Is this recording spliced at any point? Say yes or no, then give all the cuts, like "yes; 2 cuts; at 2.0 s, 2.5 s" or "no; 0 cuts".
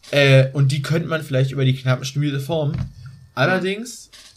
no; 0 cuts